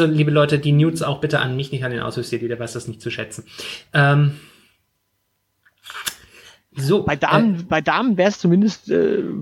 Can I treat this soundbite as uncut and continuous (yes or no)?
yes